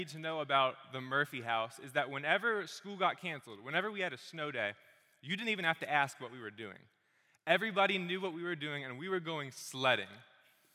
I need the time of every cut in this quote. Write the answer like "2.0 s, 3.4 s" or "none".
none